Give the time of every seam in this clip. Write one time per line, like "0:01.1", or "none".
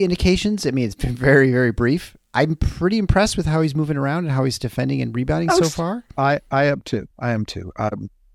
0:02.3
0:07.1